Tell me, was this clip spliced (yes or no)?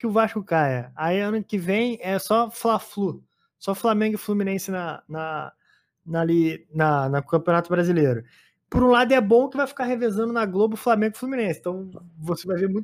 no